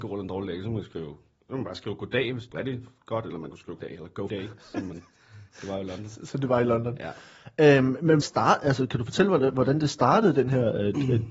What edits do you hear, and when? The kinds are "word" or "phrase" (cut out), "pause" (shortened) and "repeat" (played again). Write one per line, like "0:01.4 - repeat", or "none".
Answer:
0:02.5 - word
0:03.8 - word
0:04.3 - word
0:08.2 - word